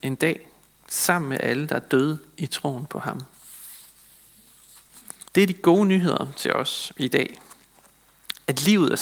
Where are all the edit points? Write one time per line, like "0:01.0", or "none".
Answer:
0:05.3